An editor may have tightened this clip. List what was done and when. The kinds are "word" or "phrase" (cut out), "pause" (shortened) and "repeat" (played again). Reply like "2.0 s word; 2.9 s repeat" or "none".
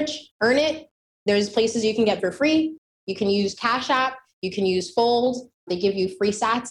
2.2 s word